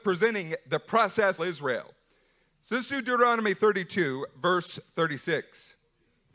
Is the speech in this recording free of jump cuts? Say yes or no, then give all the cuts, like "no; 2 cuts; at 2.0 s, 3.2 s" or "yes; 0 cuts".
no; 1 cut; at 1.4 s